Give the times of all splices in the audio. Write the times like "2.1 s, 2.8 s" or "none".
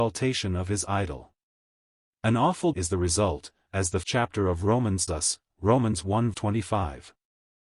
2.7 s, 4.0 s, 5.1 s, 6.3 s